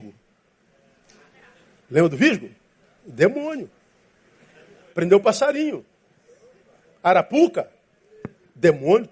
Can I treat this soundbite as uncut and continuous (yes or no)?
yes